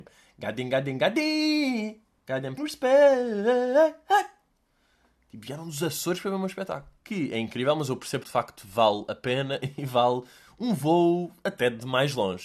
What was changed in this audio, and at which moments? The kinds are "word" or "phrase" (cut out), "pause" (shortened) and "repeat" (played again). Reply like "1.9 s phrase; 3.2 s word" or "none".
2.6 s word; 7.0 s pause; 8.2 s phrase